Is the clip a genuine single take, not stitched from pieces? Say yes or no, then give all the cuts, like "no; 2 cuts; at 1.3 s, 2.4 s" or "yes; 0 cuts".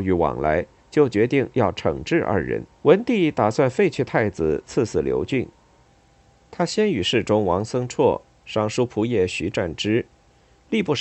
no; 1 cut; at 2.7 s